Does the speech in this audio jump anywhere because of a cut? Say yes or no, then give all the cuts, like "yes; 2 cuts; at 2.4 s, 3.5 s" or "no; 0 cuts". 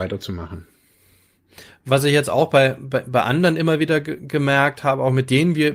no; 0 cuts